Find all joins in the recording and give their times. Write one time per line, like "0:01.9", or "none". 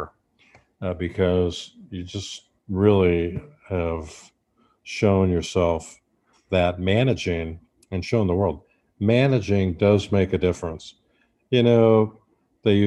none